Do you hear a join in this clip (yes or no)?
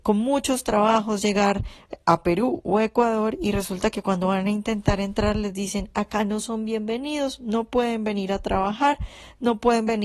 no